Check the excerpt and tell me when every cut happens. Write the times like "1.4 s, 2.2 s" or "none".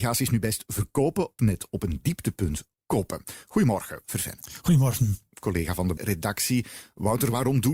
1.4 s, 4.0 s, 6.0 s